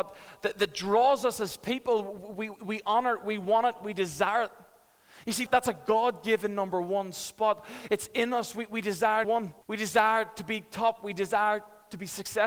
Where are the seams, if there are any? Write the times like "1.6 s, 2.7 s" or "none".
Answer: 5.5 s, 9.2 s, 9.6 s